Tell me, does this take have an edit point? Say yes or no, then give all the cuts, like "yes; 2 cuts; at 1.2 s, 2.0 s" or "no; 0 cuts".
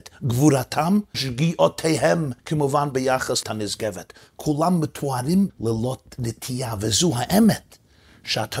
yes; 4 cuts; at 1.1 s, 2.4 s, 3.4 s, 5.5 s